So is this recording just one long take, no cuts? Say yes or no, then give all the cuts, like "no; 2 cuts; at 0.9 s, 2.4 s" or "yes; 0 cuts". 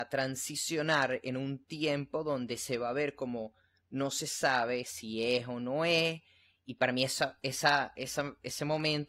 yes; 0 cuts